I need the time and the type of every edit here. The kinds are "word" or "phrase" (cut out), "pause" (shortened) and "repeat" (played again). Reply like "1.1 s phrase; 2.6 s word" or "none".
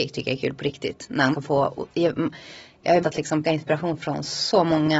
1.3 s word; 3.0 s word; 3.4 s word